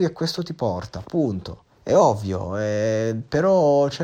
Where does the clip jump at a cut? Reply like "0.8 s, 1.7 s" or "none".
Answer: 1.7 s